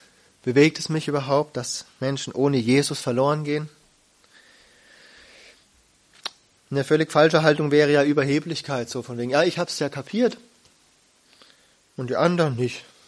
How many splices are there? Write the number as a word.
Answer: zero